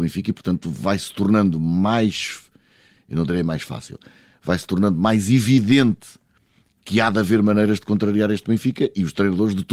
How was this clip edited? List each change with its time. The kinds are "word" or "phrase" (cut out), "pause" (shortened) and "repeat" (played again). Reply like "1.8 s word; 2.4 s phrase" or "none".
none